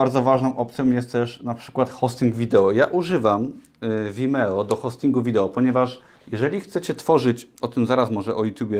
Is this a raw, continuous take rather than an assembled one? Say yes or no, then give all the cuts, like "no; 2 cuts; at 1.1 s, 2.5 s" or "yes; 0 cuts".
no; 1 cut; at 6.2 s